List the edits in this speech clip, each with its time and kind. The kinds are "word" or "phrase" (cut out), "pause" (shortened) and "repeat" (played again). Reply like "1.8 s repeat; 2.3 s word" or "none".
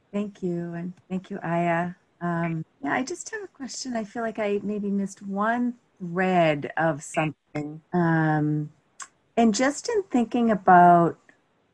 1.0 s pause; 2.7 s pause; 7.8 s pause